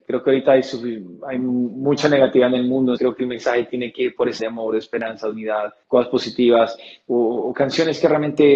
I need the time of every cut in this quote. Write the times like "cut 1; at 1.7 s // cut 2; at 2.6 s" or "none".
cut 1; at 3.0 s // cut 2; at 4.4 s // cut 3; at 5.8 s